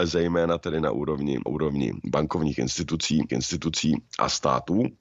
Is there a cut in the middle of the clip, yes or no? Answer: yes